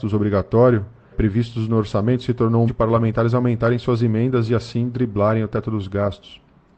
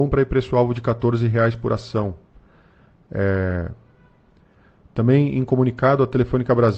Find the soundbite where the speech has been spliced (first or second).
first